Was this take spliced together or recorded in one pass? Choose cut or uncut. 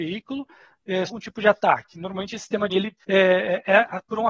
cut